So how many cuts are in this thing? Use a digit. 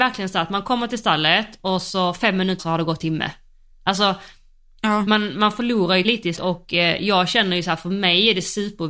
4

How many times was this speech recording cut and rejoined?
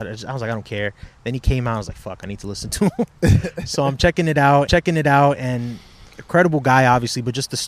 1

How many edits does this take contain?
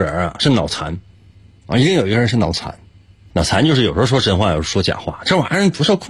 1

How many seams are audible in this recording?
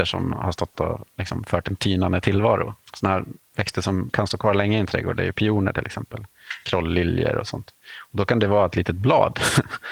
2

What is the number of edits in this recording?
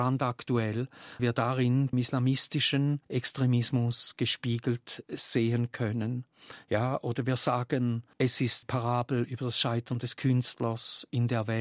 4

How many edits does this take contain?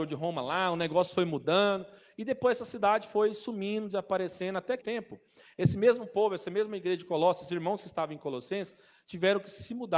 1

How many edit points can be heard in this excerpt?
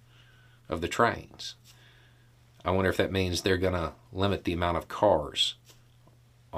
0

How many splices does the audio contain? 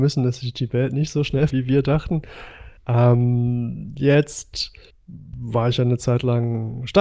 3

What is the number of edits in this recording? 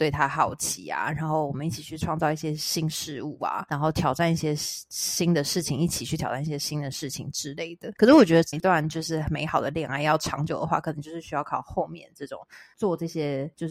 1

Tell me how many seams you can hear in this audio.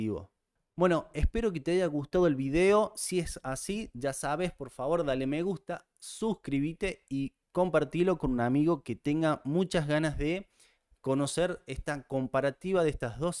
1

